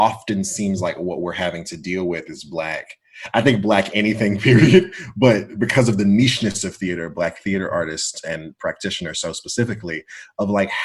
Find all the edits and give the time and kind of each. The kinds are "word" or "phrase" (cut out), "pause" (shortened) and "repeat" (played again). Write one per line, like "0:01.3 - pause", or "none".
none